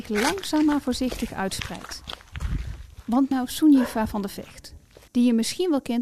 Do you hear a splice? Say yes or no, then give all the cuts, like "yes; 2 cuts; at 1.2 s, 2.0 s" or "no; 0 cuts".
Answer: yes; 2 cuts; at 3.3 s, 5.1 s